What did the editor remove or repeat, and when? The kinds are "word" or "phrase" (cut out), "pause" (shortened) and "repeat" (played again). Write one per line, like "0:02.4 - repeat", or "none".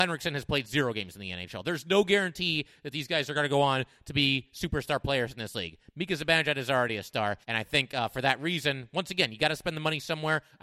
0:07.4 - pause